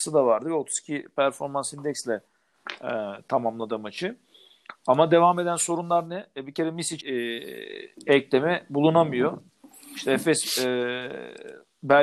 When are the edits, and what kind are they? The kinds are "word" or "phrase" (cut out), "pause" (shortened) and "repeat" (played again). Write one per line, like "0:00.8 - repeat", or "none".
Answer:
0:07.0 - phrase